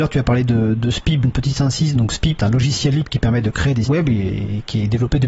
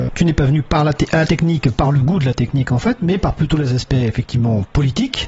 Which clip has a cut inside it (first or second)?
first